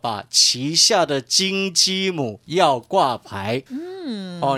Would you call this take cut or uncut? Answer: cut